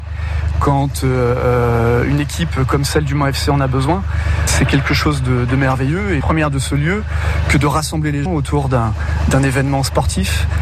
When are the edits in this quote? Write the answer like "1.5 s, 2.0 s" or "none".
6.2 s, 8.3 s